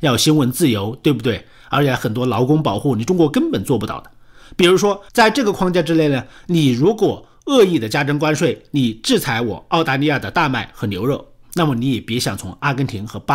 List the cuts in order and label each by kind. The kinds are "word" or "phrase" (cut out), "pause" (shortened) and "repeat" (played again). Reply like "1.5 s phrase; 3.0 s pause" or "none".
5.1 s pause